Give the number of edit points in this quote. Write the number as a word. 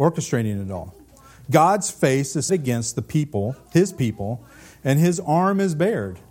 one